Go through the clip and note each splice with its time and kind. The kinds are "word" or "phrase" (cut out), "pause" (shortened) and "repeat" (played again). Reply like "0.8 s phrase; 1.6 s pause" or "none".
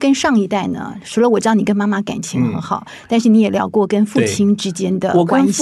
none